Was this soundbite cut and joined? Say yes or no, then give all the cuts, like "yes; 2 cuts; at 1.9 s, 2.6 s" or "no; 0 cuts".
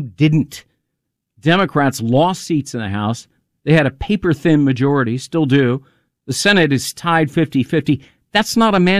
no; 0 cuts